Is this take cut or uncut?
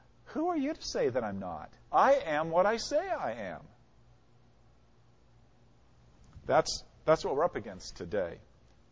cut